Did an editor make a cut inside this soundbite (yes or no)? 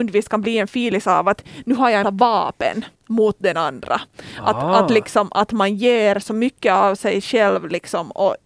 yes